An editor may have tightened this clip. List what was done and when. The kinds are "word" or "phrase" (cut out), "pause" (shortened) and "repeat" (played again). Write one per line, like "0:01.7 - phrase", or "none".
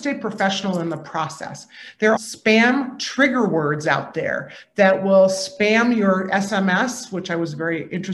0:02.2 - phrase